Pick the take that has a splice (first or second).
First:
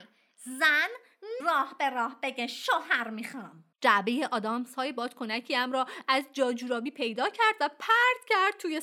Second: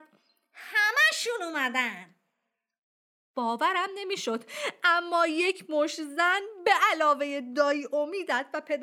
first